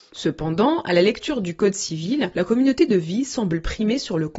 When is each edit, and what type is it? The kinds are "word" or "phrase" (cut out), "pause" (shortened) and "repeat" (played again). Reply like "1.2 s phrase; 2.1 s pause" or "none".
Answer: none